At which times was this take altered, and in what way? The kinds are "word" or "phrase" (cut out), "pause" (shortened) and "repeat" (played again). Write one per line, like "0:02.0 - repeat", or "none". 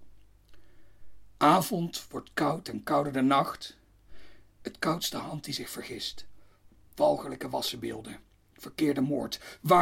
none